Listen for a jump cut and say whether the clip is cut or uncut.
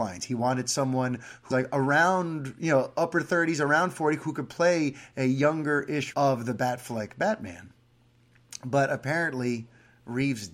cut